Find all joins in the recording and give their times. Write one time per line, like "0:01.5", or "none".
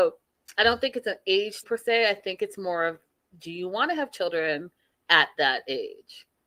0:01.6